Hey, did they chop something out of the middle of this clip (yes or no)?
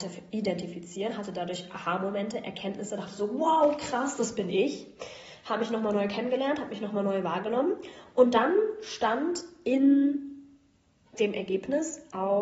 no